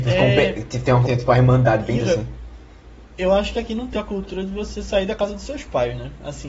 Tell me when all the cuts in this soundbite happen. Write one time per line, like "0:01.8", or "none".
0:01.0
0:02.0
0:03.9